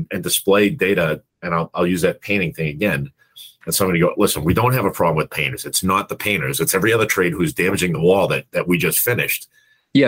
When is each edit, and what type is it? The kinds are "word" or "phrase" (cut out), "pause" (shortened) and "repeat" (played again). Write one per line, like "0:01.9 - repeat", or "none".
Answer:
0:01.3 - pause